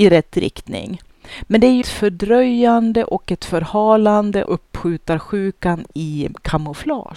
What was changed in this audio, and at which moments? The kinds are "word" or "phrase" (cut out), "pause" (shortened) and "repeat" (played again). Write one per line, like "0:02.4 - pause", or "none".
0:01.8 - word
0:04.5 - word